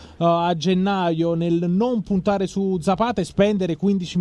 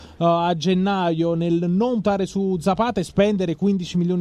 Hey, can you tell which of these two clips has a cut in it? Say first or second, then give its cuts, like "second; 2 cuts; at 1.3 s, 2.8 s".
second; 1 cut; at 2.0 s